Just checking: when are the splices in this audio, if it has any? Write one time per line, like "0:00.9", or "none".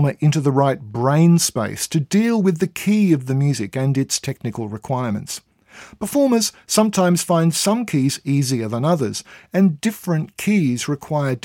none

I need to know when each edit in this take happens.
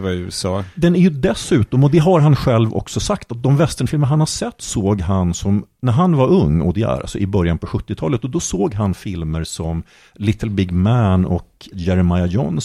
none

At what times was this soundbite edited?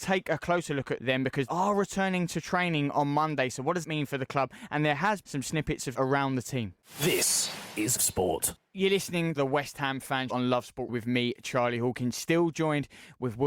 0:01.0
0:01.5
0:03.8
0:05.2
0:05.9
0:08.0
0:09.4
0:10.3
0:10.9

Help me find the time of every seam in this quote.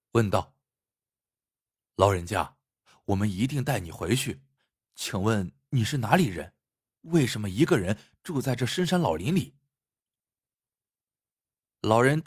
none

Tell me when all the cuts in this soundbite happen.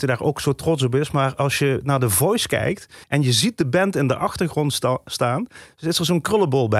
0:03.0

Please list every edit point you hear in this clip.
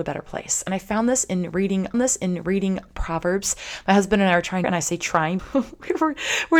0:01.9
0:04.6
0:05.4

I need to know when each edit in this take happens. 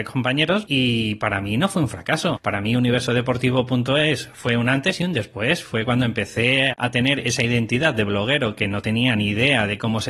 0:06.7

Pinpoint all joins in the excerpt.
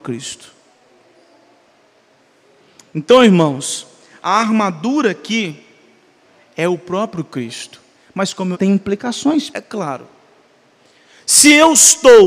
0:08.5
0:09.5

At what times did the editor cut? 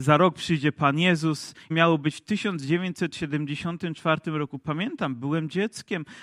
0:01.7

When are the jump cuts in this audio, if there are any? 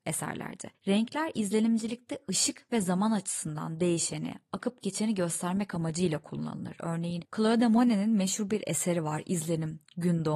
none

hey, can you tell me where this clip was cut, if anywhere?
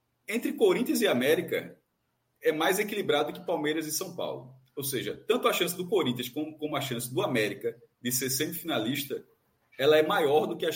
none

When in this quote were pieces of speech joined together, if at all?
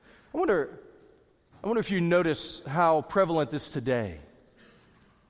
0:03.7

